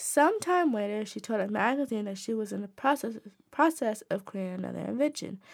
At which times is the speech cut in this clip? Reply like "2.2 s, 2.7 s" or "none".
none